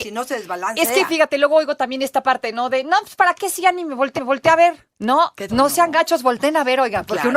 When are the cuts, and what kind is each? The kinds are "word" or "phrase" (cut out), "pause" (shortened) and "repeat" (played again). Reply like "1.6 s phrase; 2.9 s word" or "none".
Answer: 4.2 s repeat; 5.5 s word